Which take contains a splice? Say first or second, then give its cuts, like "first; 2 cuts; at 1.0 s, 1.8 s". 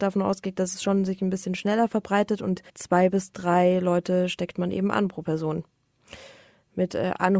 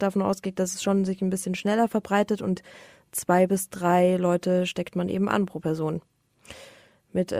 first; 1 cut; at 2.7 s